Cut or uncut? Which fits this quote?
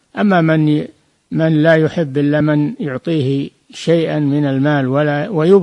uncut